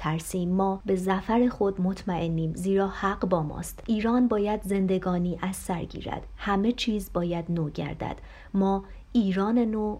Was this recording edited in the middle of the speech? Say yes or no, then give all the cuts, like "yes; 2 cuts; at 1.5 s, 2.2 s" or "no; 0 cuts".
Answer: no; 0 cuts